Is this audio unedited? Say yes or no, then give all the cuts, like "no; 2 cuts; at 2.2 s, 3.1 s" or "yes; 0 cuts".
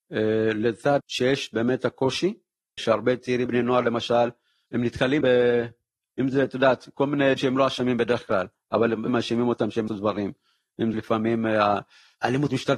no; 8 cuts; at 1.0 s, 2.8 s, 3.5 s, 5.2 s, 7.4 s, 9.1 s, 9.9 s, 10.9 s